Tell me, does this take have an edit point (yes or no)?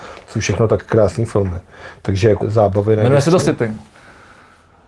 yes